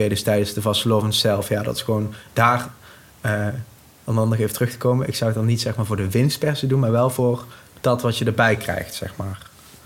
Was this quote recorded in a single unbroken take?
yes; 0 cuts

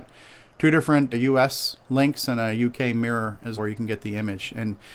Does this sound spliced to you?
yes; 2 cuts; at 1.1 s, 3.6 s

